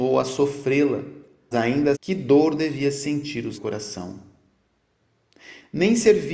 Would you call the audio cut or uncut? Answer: cut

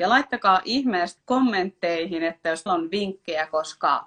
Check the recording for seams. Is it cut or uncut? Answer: cut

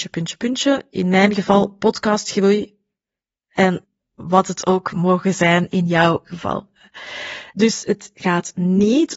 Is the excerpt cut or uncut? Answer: uncut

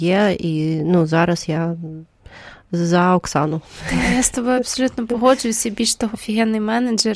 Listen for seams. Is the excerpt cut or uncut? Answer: cut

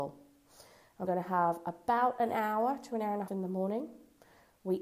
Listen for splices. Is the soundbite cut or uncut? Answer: cut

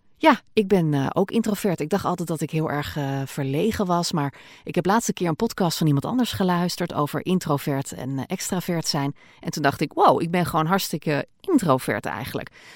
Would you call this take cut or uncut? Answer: uncut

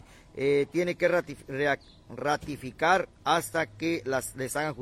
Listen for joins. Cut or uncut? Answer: cut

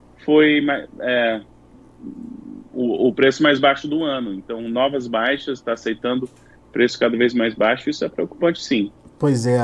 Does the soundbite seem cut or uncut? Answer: uncut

